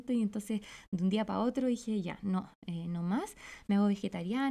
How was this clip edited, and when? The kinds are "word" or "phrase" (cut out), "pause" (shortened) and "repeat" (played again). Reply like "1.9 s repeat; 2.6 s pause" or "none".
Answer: none